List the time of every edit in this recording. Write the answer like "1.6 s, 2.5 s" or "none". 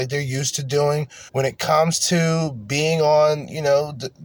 1.3 s